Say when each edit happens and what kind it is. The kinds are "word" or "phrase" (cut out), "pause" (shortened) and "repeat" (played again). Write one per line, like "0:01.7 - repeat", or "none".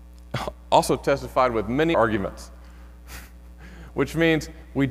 0:01.9 - word